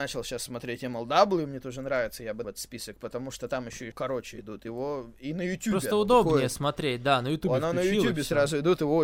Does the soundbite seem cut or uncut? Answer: cut